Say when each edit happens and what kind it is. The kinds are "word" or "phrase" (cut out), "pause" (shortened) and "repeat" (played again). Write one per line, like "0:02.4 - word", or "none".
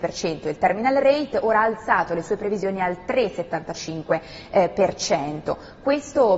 none